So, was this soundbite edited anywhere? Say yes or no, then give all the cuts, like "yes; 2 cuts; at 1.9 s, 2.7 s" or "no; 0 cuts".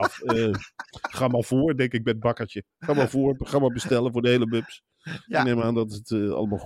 no; 0 cuts